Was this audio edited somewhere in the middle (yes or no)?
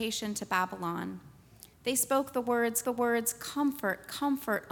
yes